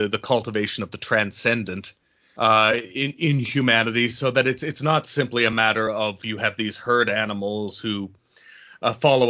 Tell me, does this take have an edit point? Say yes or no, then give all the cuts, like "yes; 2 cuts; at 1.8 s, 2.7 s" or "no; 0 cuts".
no; 0 cuts